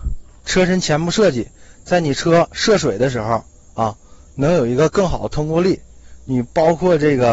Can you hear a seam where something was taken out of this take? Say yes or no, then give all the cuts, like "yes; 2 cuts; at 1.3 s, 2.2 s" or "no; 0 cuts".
no; 0 cuts